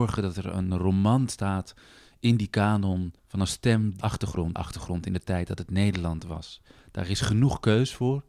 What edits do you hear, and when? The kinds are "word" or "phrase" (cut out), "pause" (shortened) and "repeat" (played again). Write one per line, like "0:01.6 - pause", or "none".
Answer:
0:03.2 - pause
0:04.0 - phrase
0:04.6 - phrase